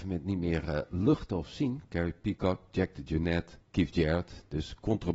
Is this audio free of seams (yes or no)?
no